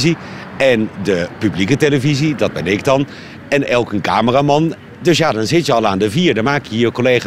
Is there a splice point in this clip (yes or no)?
no